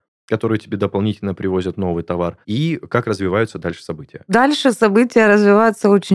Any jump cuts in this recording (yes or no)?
yes